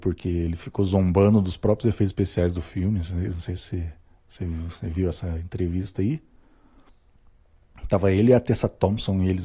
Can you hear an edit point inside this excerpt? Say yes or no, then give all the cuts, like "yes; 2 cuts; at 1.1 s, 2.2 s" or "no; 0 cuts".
no; 0 cuts